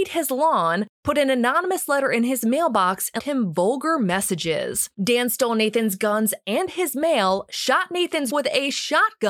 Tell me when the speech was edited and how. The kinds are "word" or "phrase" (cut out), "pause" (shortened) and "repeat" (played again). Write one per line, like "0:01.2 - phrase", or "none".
0:03.2 - word
0:04.9 - pause
0:08.3 - word